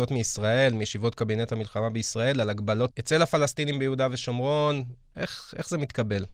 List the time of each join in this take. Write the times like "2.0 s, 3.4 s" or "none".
2.9 s